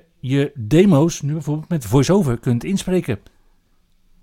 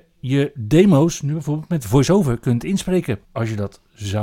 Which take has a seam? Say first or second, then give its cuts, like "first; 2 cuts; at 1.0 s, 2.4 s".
second; 1 cut; at 3.2 s